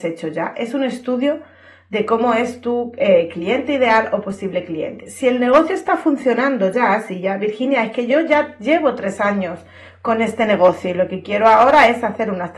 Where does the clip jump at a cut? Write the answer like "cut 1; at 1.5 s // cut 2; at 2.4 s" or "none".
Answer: none

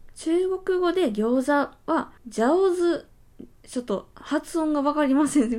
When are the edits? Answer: cut 1; at 2.2 s

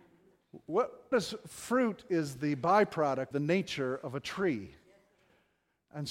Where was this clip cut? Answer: cut 1; at 1.1 s // cut 2; at 3.3 s

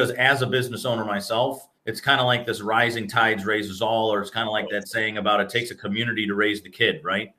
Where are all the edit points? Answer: cut 1; at 1.8 s

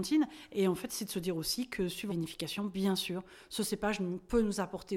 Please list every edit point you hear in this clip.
cut 1; at 2.1 s

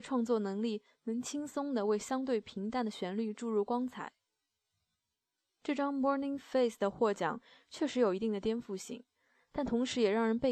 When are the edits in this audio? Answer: none

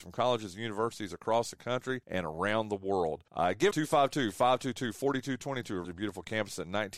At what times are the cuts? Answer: cut 1; at 2.0 s // cut 2; at 3.3 s // cut 3; at 3.7 s // cut 4; at 5.8 s

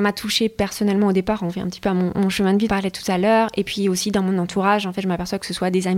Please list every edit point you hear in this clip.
cut 1; at 2.7 s

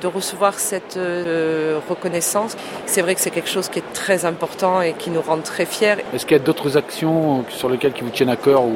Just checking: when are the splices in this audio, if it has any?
none

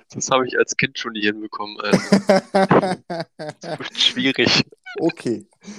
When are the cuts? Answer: none

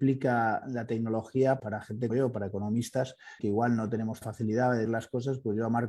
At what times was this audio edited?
cut 1; at 1.6 s // cut 2; at 2.1 s // cut 3; at 3.4 s // cut 4; at 4.2 s // cut 5; at 4.9 s

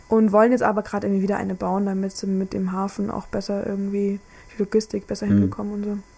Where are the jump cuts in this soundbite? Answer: none

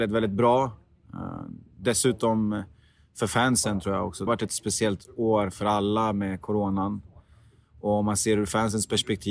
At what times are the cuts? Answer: cut 1; at 4.3 s

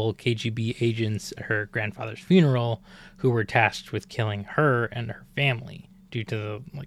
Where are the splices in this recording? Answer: cut 1; at 1.4 s

